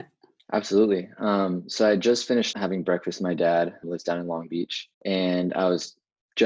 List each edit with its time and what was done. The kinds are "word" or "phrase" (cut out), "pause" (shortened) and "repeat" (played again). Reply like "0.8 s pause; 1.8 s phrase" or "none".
2.5 s word; 3.8 s word; 4.9 s pause